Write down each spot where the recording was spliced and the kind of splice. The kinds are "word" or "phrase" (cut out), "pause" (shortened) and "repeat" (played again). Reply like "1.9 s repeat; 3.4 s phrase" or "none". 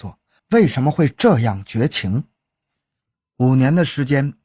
none